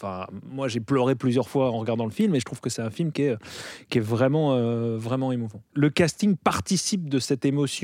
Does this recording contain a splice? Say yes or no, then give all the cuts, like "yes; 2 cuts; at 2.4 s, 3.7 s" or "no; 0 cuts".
yes; 1 cut; at 5.7 s